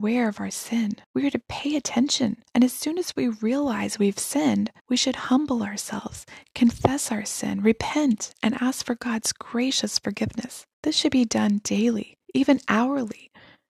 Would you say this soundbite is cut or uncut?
cut